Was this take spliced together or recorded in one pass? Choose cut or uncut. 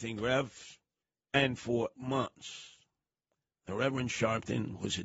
cut